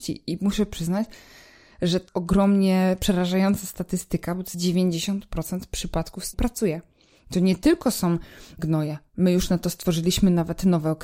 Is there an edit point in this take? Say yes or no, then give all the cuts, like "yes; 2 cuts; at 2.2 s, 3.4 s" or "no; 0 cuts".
yes; 4 cuts; at 2.1 s, 4.5 s, 6.3 s, 8.6 s